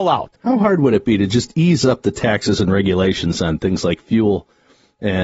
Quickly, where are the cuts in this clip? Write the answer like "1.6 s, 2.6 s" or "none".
none